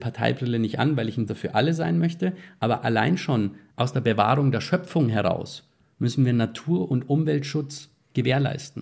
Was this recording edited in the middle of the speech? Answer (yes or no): yes